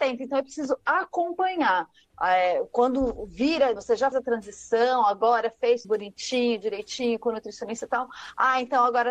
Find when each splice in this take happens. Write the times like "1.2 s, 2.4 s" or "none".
3.8 s, 4.1 s, 5.8 s